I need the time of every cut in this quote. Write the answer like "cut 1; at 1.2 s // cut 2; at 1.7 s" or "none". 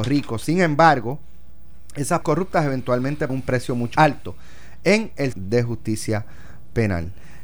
cut 1; at 2.2 s // cut 2; at 3.3 s // cut 3; at 4.0 s // cut 4; at 5.3 s

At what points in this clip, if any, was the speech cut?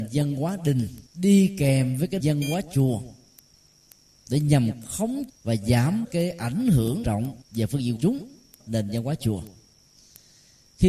cut 1; at 1.1 s // cut 2; at 2.2 s // cut 3; at 5.3 s // cut 4; at 6.0 s // cut 5; at 7.0 s // cut 6; at 7.4 s // cut 7; at 8.0 s // cut 8; at 8.6 s

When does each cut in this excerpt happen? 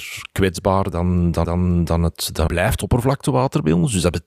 cut 1; at 1.4 s // cut 2; at 2.5 s

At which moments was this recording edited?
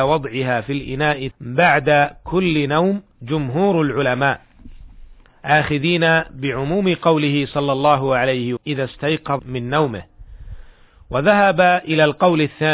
cut 1; at 1.3 s // cut 2; at 3.1 s // cut 3; at 8.6 s // cut 4; at 9.4 s

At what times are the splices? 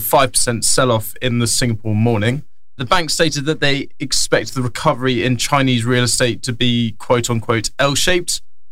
none

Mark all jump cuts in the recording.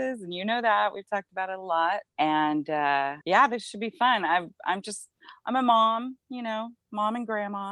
cut 1; at 2.1 s // cut 2; at 3.2 s

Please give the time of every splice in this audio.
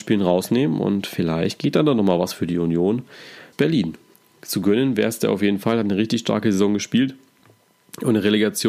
cut 1; at 3.5 s // cut 2; at 4.1 s

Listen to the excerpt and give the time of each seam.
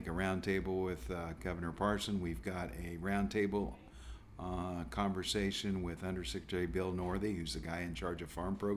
none

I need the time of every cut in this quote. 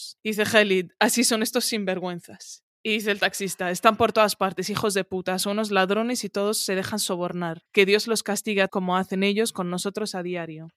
cut 1; at 8.7 s

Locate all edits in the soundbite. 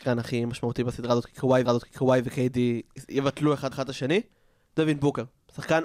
cut 1; at 1.7 s // cut 2; at 3.7 s

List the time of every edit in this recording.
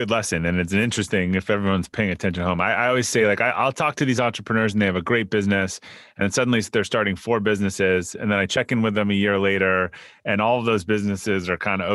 none

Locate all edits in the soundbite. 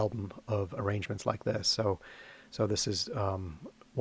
none

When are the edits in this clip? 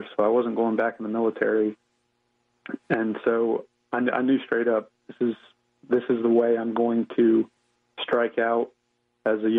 none

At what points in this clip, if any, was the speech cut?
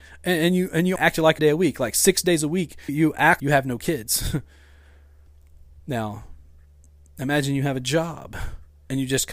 cut 1; at 1.0 s // cut 2; at 1.4 s // cut 3; at 2.9 s // cut 4; at 3.4 s

